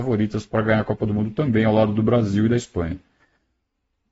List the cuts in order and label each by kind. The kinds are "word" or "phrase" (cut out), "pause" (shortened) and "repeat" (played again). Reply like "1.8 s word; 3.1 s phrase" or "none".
none